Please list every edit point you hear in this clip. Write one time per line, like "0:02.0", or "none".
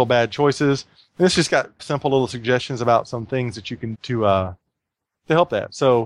0:01.8
0:03.9